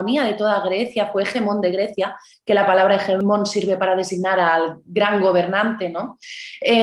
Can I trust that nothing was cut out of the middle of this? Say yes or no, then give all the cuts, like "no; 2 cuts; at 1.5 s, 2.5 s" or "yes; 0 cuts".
yes; 0 cuts